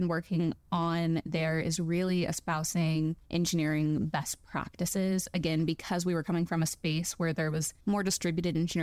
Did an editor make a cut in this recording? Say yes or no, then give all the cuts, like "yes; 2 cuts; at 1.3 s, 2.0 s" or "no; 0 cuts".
yes; 2 cuts; at 3.2 s, 7.8 s